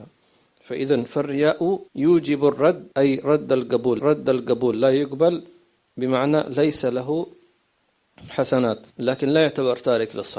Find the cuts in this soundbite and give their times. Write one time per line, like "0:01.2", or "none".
0:01.9
0:02.9
0:04.0
0:08.9